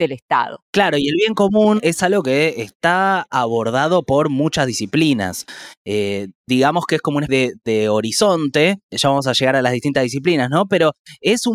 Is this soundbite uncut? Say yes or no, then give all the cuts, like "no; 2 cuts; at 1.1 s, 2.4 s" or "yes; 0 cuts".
no; 2 cuts; at 7.3 s, 8.9 s